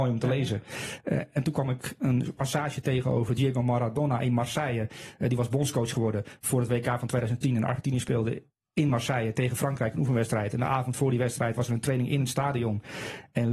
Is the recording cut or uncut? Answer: uncut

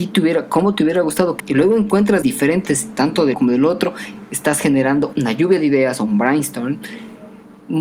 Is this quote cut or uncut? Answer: cut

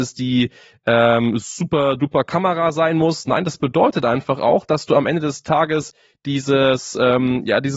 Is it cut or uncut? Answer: uncut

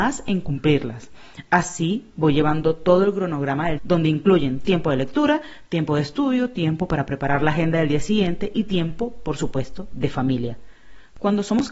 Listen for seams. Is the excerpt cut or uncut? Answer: cut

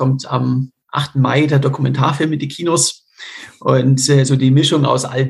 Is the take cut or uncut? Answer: uncut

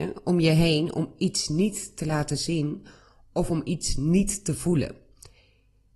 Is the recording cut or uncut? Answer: uncut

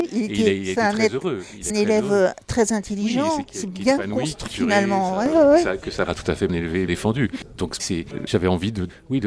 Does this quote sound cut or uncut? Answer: cut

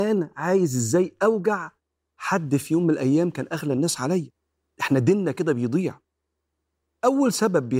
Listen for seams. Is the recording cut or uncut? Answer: uncut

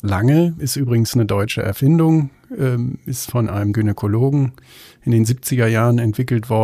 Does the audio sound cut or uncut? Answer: cut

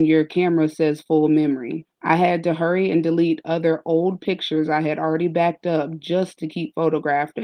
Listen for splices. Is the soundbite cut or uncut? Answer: cut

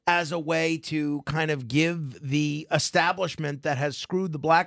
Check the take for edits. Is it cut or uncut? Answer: uncut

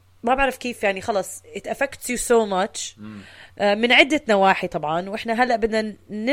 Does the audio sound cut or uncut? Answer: uncut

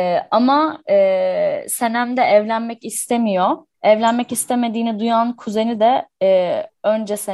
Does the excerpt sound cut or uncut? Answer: cut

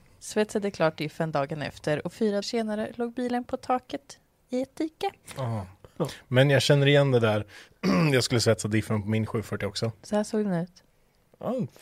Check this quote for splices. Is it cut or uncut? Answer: cut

